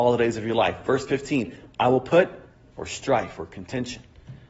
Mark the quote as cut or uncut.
cut